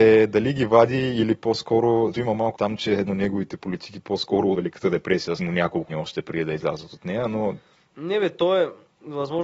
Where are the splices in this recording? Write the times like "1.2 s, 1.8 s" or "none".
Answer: 2.1 s, 2.5 s, 3.1 s, 4.5 s, 5.4 s, 5.9 s